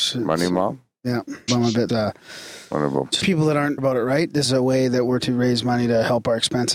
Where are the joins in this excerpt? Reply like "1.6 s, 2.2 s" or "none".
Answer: 1.5 s, 1.9 s, 3.2 s, 3.8 s, 4.4 s, 5.2 s